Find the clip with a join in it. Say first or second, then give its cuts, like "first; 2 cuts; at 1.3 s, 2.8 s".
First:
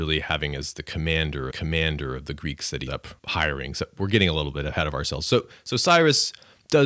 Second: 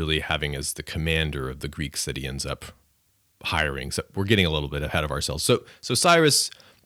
first; 3 cuts; at 1.5 s, 2.9 s, 3.2 s